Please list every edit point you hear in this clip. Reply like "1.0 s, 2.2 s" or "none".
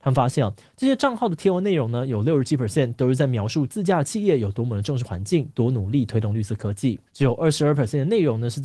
7.1 s